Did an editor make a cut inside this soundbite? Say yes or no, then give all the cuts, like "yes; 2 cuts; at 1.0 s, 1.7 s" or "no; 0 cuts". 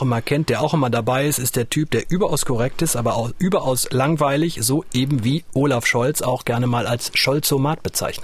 no; 0 cuts